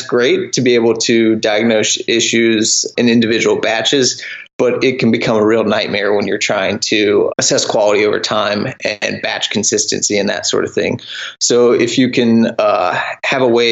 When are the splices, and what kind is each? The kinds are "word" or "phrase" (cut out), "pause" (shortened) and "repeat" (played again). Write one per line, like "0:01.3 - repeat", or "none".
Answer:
0:03.0 - word
0:07.3 - word

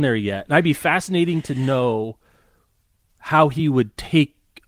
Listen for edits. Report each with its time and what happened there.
none

